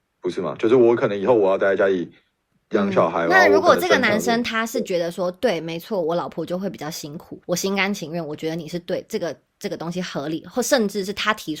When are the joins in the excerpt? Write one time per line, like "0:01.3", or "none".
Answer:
0:07.4